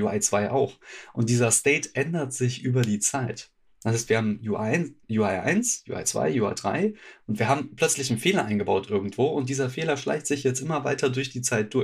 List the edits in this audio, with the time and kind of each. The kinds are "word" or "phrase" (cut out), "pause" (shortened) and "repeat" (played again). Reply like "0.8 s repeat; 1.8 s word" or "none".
5.0 s pause